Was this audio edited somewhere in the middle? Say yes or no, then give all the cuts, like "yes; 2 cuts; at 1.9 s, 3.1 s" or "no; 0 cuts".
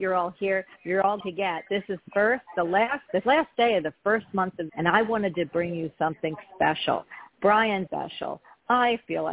yes; 6 cuts; at 1.2 s, 1.7 s, 2.0 s, 3.1 s, 4.7 s, 7.9 s